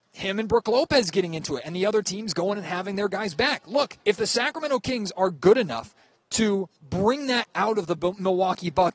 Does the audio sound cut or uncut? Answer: cut